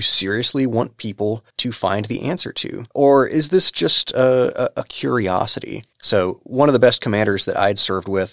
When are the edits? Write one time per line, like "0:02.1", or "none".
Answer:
0:01.5
0:02.9
0:05.9